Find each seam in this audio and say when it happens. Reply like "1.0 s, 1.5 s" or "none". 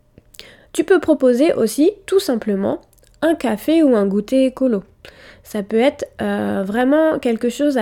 none